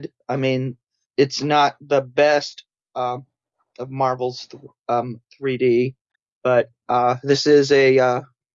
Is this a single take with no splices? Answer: yes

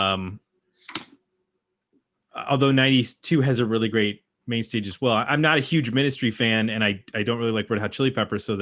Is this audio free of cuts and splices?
yes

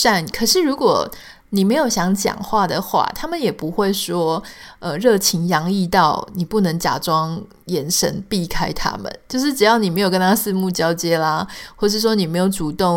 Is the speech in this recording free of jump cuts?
yes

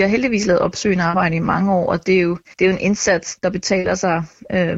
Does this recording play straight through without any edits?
no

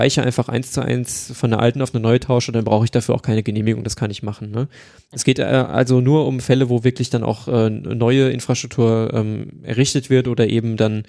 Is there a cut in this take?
no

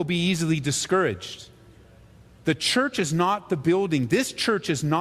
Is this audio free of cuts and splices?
yes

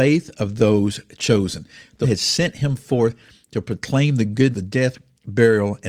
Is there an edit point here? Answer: yes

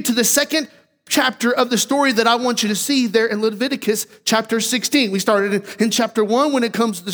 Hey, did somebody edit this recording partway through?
no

